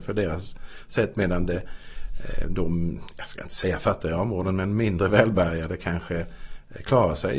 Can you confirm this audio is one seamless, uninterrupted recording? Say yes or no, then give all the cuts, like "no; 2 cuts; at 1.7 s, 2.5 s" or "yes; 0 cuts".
yes; 0 cuts